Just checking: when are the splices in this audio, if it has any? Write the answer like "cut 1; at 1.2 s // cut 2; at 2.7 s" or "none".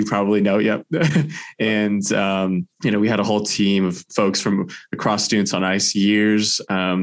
cut 1; at 2.7 s

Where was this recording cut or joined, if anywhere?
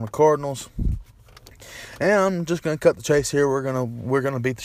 none

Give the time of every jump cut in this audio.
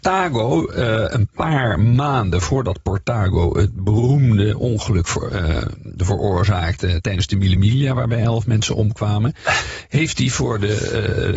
none

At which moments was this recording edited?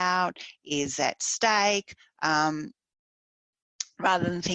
none

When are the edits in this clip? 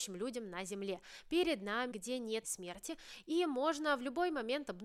cut 1; at 1.9 s // cut 2; at 2.4 s

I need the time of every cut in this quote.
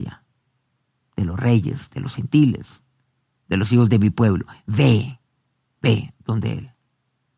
none

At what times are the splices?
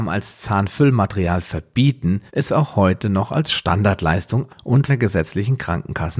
cut 1; at 2.3 s // cut 2; at 4.5 s // cut 3; at 4.9 s

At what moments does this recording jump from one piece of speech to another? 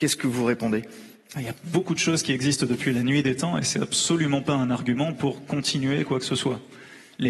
none

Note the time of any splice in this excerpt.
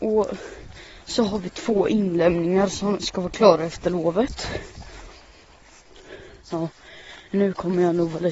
none

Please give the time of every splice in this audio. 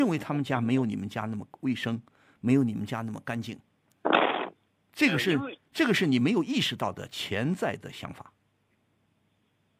cut 1; at 4.7 s

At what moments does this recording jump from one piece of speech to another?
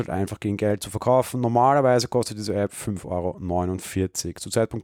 none

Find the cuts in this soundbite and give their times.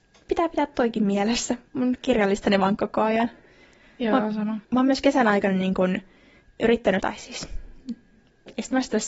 cut 1; at 1.7 s // cut 2; at 2.8 s // cut 3; at 4.6 s // cut 4; at 7.0 s

